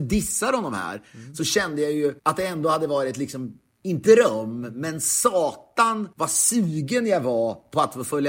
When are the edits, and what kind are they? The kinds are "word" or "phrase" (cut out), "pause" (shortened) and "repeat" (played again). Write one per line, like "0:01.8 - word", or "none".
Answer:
0:02.2 - pause
0:04.0 - word
0:06.1 - pause